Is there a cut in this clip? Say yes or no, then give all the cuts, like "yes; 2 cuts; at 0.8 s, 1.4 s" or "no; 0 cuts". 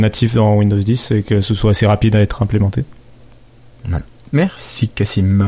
no; 0 cuts